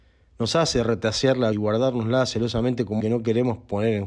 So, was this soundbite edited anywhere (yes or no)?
yes